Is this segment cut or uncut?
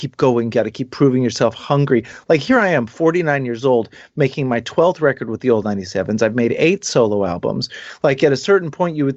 uncut